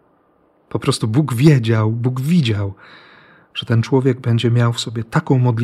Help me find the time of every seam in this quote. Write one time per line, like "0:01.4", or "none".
none